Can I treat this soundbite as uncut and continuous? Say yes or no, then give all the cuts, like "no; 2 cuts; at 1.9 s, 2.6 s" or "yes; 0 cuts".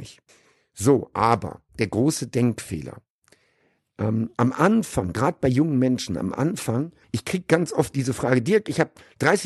no; 2 cuts; at 1.7 s, 4.3 s